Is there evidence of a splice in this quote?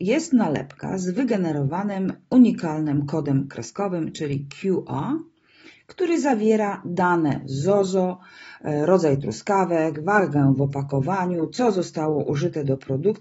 no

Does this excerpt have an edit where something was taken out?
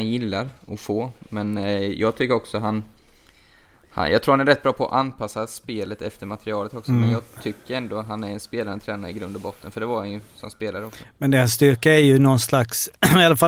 no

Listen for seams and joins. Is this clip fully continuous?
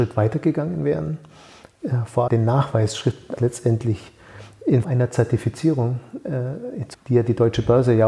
no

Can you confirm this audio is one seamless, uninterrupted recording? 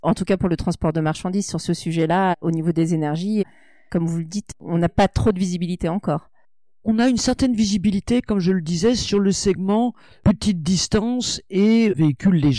yes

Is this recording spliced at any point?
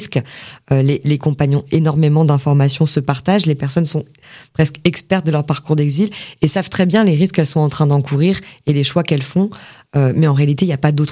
no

